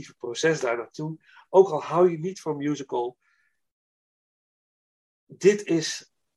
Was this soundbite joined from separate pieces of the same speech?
no; 0 cuts

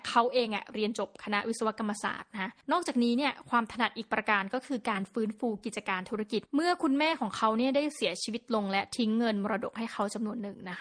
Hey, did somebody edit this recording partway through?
yes; 2 cuts; at 2.6 s, 6.5 s

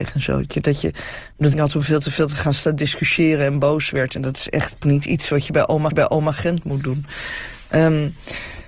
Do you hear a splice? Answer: yes; 2 cuts; at 1.5 s, 5.9 s

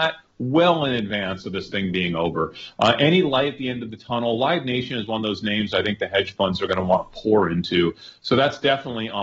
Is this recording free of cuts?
yes; 0 cuts

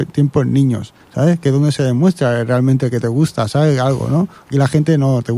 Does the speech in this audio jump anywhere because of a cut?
yes; 1 cut; at 1.0 s

